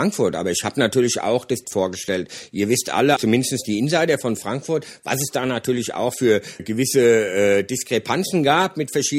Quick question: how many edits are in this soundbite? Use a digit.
3